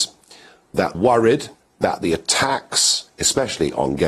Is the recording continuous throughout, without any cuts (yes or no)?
no